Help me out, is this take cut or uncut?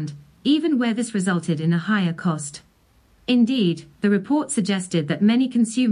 uncut